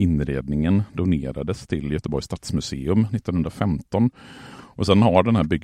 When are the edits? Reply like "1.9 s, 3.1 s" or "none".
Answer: none